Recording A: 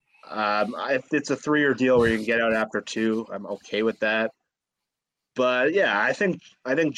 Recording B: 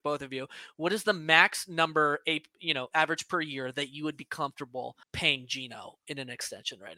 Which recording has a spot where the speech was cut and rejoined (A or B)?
B